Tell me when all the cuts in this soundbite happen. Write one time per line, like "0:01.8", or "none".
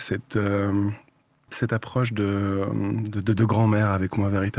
none